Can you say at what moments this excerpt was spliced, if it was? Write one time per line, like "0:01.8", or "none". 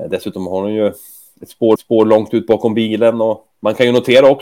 0:01.8
0:03.5